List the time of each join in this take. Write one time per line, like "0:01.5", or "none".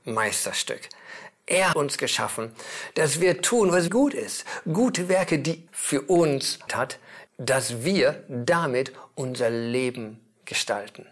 0:01.7
0:03.9
0:05.7
0:06.7
0:07.3